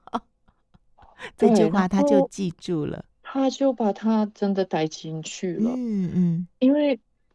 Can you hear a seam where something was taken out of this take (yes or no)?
yes